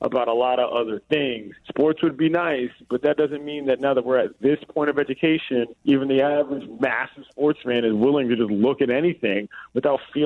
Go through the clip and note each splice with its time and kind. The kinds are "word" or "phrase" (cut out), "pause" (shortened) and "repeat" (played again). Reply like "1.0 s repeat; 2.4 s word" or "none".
1.6 s pause; 5.8 s pause